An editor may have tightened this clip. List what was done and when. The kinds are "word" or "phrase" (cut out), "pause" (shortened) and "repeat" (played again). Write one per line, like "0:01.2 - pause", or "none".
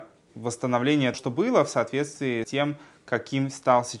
0:01.1 - word
0:02.4 - word